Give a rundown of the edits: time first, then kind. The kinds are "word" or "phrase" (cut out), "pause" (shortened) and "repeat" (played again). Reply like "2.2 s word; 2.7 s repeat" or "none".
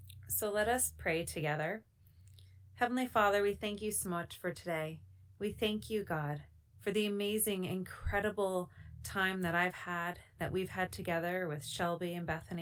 none